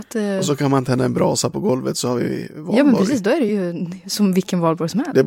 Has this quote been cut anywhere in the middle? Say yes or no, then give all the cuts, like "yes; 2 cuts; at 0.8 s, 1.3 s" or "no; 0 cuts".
no; 0 cuts